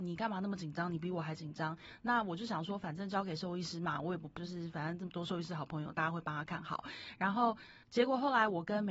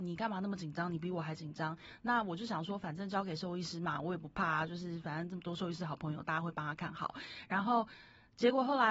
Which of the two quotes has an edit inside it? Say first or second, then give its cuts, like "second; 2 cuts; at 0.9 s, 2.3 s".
first; 2 cuts; at 4.4 s, 7.8 s